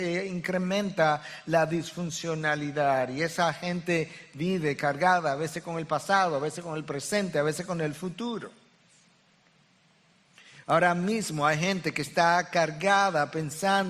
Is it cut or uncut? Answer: uncut